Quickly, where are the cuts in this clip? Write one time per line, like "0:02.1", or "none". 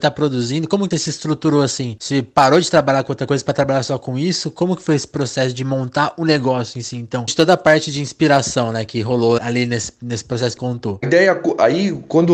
0:00.9
0:07.3
0:09.4
0:10.6
0:11.0

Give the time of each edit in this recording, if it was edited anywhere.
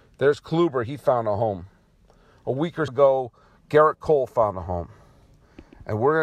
0:02.9

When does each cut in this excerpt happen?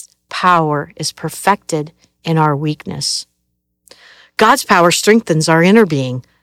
none

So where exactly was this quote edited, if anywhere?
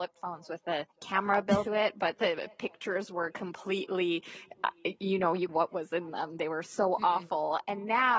0:00.9
0:01.7
0:05.5

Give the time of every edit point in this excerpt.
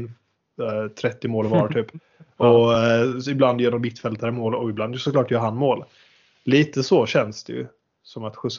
none

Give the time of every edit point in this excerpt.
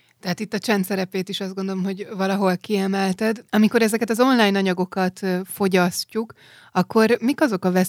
0:03.5

